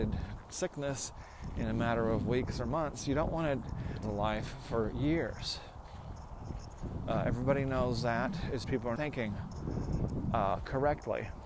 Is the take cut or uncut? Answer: cut